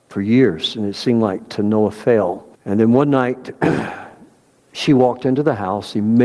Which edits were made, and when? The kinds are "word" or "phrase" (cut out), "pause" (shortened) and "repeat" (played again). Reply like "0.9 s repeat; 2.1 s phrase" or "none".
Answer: 2.5 s pause